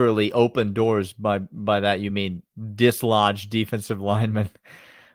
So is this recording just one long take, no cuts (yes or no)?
yes